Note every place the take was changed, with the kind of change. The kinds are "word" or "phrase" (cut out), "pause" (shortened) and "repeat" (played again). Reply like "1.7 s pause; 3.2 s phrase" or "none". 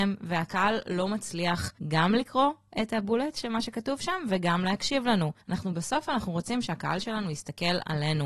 1.8 s pause; 5.4 s pause